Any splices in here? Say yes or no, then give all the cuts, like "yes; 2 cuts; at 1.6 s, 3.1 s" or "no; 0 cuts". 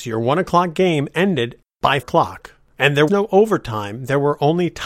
yes; 2 cuts; at 2.0 s, 3.1 s